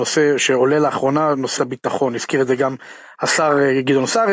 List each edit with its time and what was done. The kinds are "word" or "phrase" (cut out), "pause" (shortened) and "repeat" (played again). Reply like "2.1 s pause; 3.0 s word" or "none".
1.6 s word

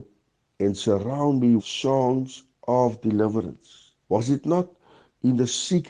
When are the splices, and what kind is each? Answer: 1.6 s word; 4.0 s pause

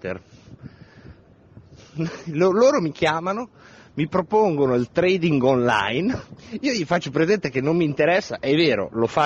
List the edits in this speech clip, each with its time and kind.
none

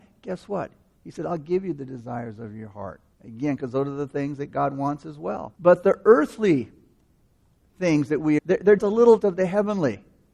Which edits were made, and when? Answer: 3.1 s pause; 5.6 s pause; 8.4 s word; 8.8 s word; 9.2 s word

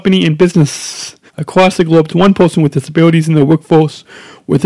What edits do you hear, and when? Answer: 1.3 s pause; 2.1 s phrase

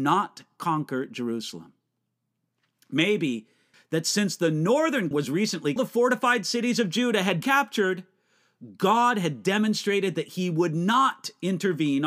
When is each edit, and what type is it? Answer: 3.7 s phrase; 5.1 s word; 5.8 s phrase; 7.4 s word

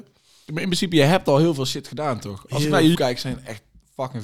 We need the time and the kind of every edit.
2.9 s word

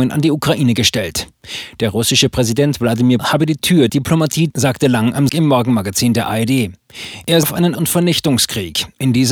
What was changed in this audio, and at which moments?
3.2 s word; 3.9 s word; 4.5 s word; 5.3 s word; 7.4 s word; 7.7 s word

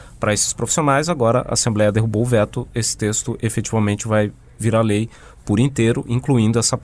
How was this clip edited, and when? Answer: none

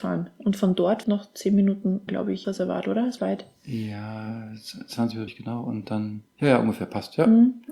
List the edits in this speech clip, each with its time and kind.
1.0 s word; 2.1 s word; 2.4 s word; 3.2 s phrase; 5.3 s phrase; 6.3 s pause

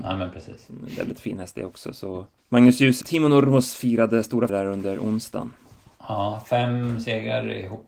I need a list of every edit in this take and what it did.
2.4 s pause; 3.0 s word; 4.5 s word

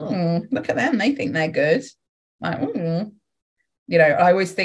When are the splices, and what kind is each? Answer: none

